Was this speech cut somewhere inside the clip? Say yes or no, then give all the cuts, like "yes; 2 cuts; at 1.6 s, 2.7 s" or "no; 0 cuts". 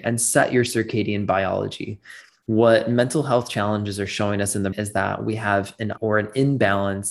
yes; 2 cuts; at 4.7 s, 6.0 s